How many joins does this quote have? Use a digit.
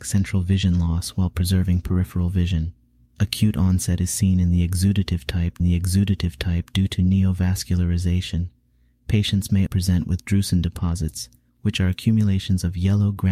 2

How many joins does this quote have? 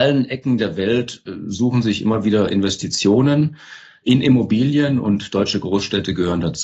0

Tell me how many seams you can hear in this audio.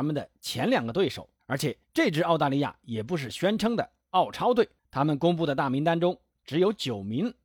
3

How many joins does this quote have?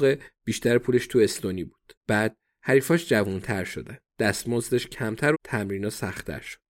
3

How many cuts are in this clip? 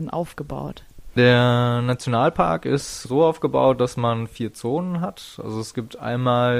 0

